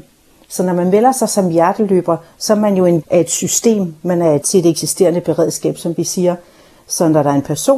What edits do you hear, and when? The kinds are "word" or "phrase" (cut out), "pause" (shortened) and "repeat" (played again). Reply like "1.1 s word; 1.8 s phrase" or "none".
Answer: 3.0 s word; 4.4 s word